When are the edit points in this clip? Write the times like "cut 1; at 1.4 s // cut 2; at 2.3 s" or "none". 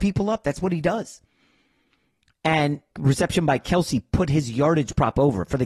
cut 1; at 2.9 s